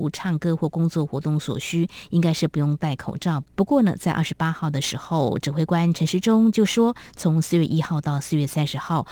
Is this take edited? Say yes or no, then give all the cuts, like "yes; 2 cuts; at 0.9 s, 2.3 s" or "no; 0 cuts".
yes; 1 cut; at 3.5 s